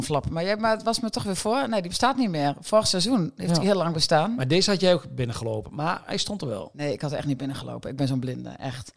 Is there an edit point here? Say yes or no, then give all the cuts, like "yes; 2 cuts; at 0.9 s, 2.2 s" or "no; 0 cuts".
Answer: no; 0 cuts